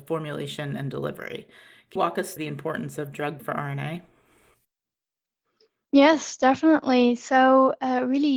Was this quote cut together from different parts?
yes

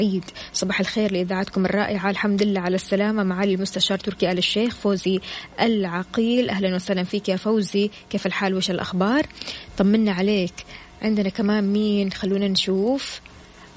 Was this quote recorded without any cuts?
yes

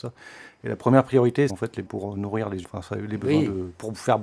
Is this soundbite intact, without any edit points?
no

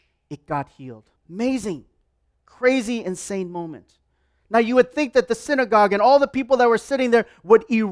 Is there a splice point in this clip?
yes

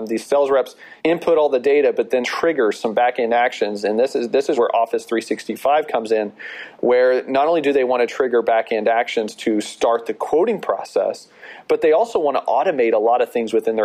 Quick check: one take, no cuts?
no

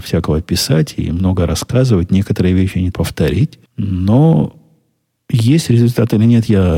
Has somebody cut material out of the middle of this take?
yes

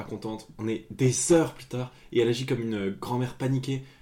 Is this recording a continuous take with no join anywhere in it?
yes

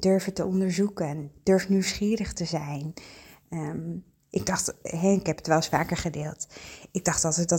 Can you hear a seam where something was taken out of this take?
no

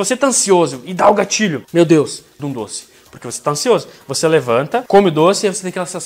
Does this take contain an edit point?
yes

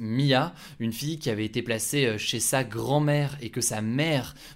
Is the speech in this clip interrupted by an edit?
no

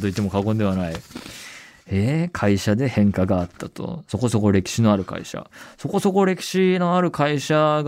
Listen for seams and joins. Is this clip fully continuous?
yes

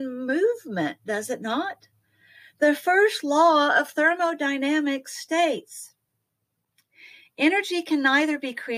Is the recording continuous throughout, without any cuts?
yes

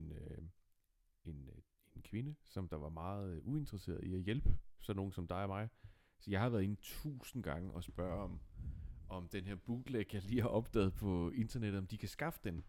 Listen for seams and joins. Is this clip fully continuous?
yes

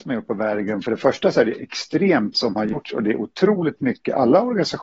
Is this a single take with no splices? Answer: no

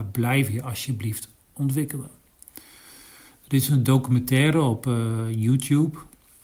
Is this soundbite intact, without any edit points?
yes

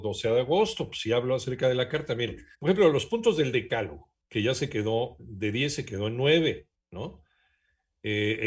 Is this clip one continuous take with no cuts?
no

